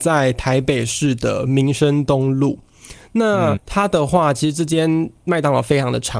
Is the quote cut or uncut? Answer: cut